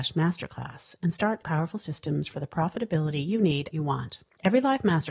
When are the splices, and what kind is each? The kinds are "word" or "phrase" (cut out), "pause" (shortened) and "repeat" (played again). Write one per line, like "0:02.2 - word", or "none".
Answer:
0:01.4 - word
0:03.7 - phrase